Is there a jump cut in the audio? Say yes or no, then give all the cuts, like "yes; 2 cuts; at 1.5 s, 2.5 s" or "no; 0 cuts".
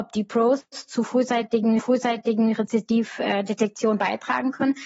yes; 1 cut; at 1.8 s